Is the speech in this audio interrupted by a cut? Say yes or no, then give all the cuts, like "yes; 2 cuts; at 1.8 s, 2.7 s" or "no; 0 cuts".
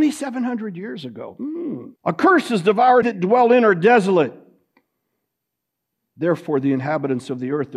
yes; 2 cuts; at 2.0 s, 3.0 s